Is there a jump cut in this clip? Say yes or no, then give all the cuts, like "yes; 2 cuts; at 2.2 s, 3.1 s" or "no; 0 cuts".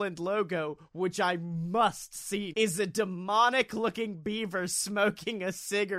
yes; 1 cut; at 2.5 s